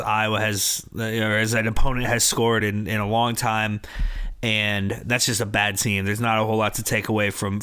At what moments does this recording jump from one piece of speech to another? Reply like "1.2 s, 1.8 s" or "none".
none